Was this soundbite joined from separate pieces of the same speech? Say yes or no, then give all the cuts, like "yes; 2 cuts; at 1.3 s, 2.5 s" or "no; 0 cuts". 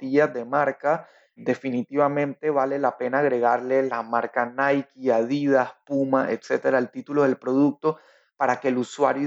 no; 0 cuts